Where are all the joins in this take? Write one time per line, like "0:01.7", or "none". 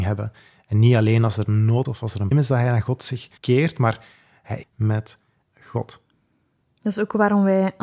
0:01.8
0:02.3
0:03.4
0:04.6